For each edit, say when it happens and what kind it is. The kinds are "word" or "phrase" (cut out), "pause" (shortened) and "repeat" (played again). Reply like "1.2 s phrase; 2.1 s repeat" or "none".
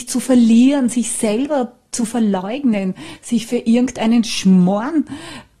none